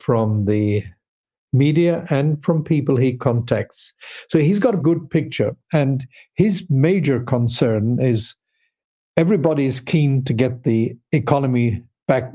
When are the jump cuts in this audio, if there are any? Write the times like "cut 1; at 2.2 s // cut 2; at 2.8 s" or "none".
cut 1; at 4.8 s